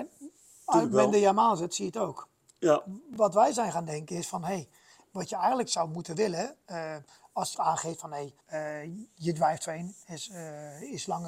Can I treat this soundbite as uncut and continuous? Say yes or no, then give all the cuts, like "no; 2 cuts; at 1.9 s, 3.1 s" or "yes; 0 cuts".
no; 2 cuts; at 7.5 s, 8.4 s